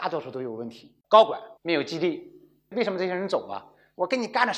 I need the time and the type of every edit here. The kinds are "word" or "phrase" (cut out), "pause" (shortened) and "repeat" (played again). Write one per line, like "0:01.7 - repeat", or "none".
0:01.0 - pause
0:01.6 - pause